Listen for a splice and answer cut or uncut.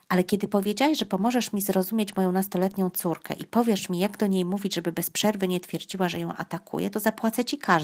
uncut